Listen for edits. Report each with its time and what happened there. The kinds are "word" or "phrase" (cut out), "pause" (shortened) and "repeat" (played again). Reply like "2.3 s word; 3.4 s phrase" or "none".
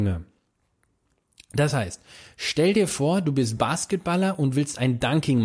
none